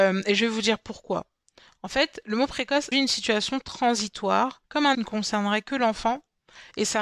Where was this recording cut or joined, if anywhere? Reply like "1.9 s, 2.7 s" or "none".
2.9 s, 4.6 s, 4.9 s